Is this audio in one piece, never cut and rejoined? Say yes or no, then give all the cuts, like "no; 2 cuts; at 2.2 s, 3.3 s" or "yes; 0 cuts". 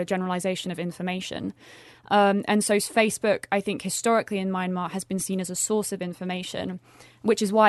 yes; 0 cuts